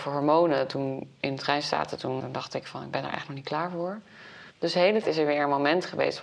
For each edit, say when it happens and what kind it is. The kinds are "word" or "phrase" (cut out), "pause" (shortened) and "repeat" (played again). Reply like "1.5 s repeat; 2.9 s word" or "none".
2.2 s word; 4.5 s pause; 5.0 s word